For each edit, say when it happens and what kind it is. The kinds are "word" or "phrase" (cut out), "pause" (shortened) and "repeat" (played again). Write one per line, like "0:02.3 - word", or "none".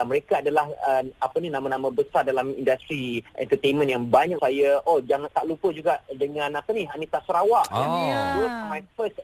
0:03.3 - pause
0:04.4 - word
0:05.3 - word